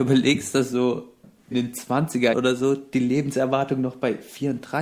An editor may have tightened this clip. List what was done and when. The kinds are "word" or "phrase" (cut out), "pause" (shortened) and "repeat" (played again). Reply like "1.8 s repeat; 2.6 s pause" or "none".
1.5 s word; 2.3 s word